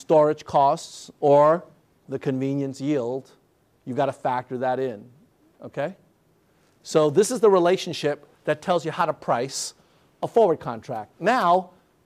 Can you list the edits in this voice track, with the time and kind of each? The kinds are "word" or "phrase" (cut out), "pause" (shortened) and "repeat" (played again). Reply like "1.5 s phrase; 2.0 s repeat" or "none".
none